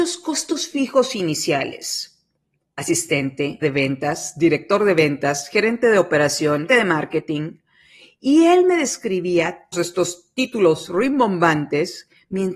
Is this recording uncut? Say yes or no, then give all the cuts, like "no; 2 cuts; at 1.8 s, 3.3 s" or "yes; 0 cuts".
no; 3 cuts; at 3.6 s, 6.7 s, 9.7 s